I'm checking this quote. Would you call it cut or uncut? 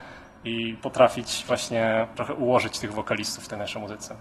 uncut